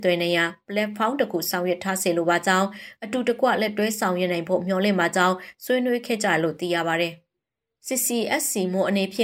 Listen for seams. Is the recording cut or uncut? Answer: uncut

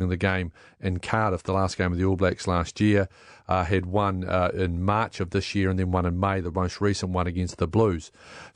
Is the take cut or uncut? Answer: uncut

